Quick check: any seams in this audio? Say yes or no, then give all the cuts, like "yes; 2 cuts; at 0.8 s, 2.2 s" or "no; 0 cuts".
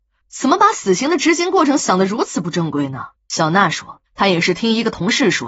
yes; 2 cuts; at 3.2 s, 4.1 s